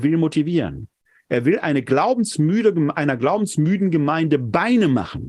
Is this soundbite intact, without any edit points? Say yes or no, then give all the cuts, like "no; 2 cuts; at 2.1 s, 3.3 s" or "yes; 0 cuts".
yes; 0 cuts